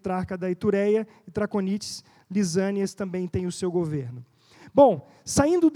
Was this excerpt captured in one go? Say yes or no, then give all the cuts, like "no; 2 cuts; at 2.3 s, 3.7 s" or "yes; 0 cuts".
yes; 0 cuts